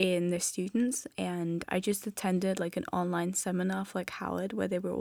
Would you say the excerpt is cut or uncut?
uncut